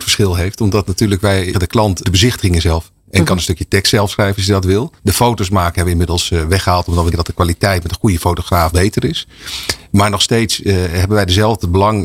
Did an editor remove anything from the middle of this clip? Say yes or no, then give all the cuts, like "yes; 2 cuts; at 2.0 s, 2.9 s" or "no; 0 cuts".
yes; 5 cuts; at 1.5 s, 2.0 s, 5.0 s, 7.1 s, 8.7 s